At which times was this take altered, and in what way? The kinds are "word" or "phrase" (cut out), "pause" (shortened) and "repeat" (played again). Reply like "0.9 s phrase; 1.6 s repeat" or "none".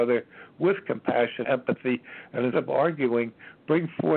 1.4 s word; 2.5 s word